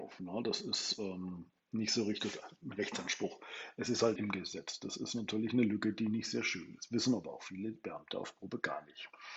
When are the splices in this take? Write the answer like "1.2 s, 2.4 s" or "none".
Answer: 4.2 s